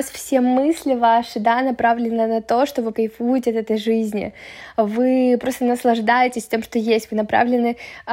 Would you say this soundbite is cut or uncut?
cut